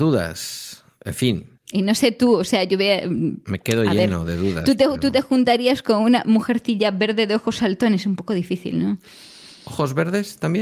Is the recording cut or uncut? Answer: uncut